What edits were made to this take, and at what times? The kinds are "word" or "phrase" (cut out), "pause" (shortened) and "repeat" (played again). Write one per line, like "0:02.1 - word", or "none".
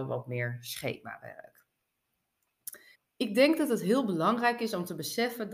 0:02.9 - pause